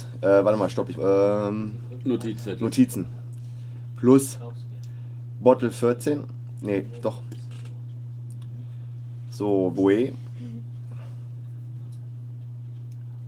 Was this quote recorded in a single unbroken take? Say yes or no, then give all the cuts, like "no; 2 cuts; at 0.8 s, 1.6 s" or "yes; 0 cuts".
no; 2 cuts; at 1.0 s, 9.7 s